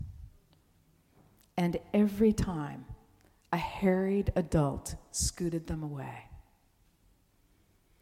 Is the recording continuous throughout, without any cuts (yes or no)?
yes